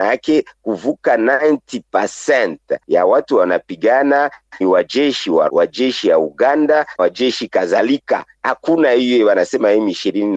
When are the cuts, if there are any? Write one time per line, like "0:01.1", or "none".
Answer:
0:04.6
0:05.5
0:07.0